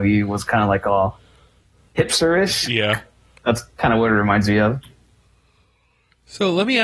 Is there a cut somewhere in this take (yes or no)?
no